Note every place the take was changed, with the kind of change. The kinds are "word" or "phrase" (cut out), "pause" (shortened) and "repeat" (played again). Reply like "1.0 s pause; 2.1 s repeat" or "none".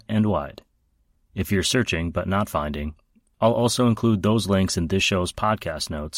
none